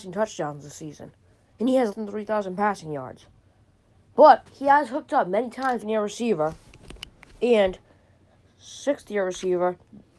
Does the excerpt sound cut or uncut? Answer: cut